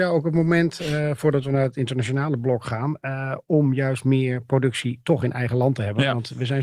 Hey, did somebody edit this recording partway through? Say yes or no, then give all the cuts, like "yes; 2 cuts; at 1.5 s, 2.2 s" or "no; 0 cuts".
no; 0 cuts